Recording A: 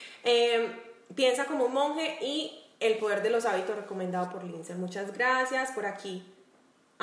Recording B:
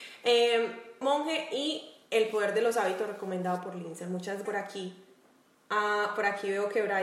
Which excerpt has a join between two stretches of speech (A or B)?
B